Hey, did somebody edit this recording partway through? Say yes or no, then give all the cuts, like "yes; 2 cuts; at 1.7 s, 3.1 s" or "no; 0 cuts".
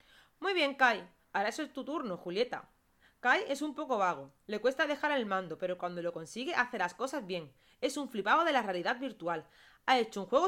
no; 0 cuts